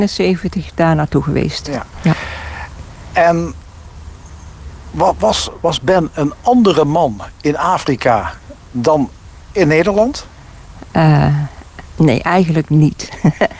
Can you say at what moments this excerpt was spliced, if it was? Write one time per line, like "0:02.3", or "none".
none